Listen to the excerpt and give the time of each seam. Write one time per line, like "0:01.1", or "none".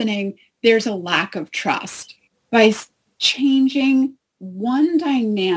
0:02.3